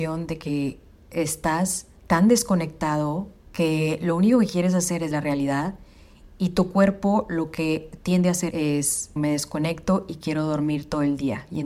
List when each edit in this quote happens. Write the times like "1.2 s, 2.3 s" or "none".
2.0 s, 3.4 s, 5.1 s, 8.5 s, 9.2 s